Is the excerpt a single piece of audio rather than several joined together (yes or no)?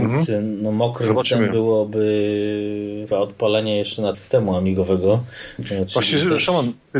no